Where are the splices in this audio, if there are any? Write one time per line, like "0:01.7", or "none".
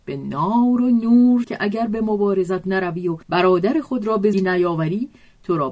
0:01.4
0:03.2
0:04.3